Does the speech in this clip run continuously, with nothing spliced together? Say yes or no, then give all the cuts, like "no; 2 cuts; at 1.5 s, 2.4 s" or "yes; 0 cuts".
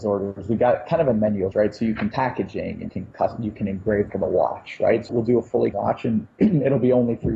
no; 6 cuts; at 1.5 s, 2.1 s, 2.9 s, 4.1 s, 5.1 s, 5.7 s